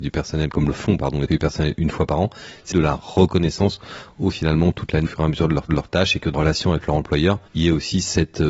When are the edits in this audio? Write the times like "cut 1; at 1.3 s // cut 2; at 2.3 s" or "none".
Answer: cut 1; at 1.3 s // cut 2; at 2.7 s // cut 3; at 4.3 s // cut 4; at 5.0 s // cut 5; at 5.7 s // cut 6; at 6.3 s // cut 7; at 7.5 s

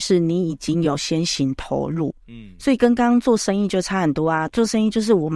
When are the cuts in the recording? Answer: none

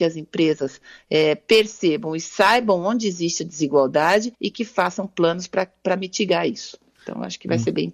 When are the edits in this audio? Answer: cut 1; at 4.3 s

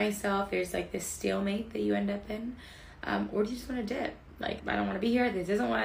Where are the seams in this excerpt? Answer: cut 1; at 4.6 s

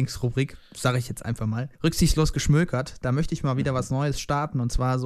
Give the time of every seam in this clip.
cut 1; at 1.7 s

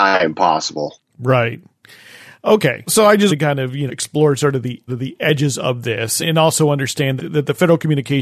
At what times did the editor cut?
cut 1; at 2.9 s // cut 2; at 3.3 s // cut 3; at 3.9 s // cut 4; at 4.9 s // cut 5; at 6.2 s // cut 6; at 7.2 s

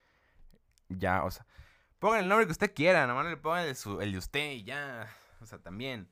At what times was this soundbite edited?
none

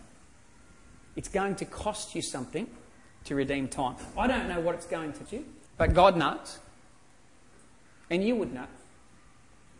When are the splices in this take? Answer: cut 1; at 5.3 s // cut 2; at 5.7 s

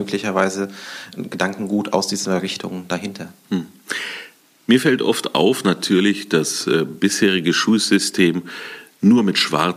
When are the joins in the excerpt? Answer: cut 1; at 5.6 s

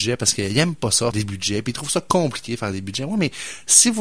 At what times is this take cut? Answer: cut 1; at 1.1 s

